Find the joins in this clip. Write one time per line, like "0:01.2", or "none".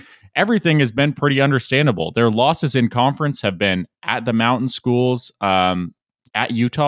none